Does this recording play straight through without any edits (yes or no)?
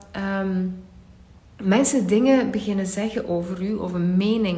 yes